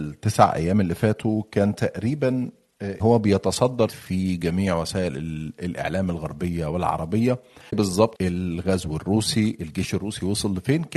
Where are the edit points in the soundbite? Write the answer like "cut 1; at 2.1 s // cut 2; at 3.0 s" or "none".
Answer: cut 1; at 3.0 s // cut 2; at 3.9 s // cut 3; at 7.7 s // cut 4; at 8.1 s